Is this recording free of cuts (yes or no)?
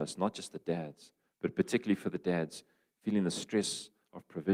yes